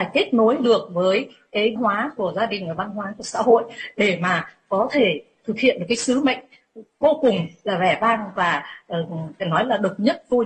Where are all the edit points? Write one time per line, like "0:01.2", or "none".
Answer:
0:01.8